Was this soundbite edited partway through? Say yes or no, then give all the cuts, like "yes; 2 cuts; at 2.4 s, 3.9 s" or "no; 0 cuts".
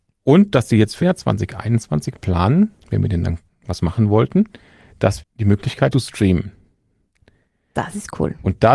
yes; 5 cuts; at 1.0 s, 2.8 s, 3.5 s, 5.2 s, 5.9 s